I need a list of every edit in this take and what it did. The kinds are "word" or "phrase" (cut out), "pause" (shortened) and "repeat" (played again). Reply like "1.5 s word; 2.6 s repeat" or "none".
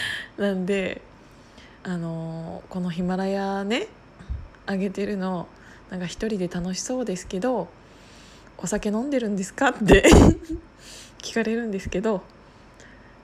1.8 s pause